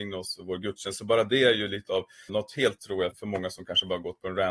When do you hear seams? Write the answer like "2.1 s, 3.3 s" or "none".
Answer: 2.3 s, 2.8 s, 3.1 s